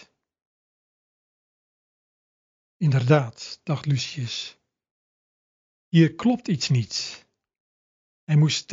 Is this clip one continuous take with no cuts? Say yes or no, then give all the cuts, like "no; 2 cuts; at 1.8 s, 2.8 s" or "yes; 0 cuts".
yes; 0 cuts